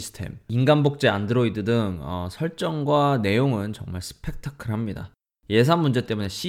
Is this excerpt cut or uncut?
uncut